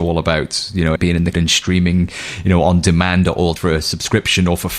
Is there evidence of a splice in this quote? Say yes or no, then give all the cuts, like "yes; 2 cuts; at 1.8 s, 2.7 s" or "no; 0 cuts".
yes; 3 cuts; at 1.0 s, 1.3 s, 3.6 s